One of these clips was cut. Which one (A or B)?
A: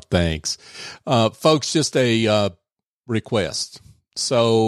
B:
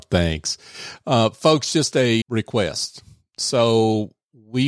B